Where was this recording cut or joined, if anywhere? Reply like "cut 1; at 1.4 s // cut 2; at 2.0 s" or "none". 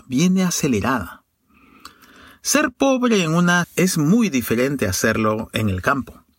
cut 1; at 3.6 s